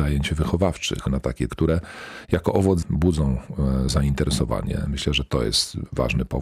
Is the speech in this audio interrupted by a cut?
yes; 4 cuts; at 1.1 s, 1.5 s, 2.8 s, 3.9 s

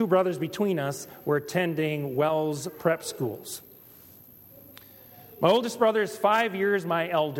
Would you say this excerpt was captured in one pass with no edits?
yes; 0 cuts

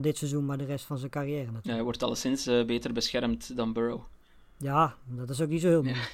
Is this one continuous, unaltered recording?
yes; 0 cuts

